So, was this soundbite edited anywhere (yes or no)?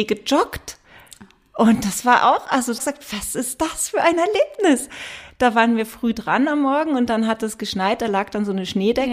yes